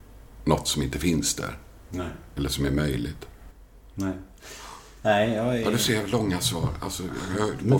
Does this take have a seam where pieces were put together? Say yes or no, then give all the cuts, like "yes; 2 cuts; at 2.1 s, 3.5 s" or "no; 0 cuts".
no; 0 cuts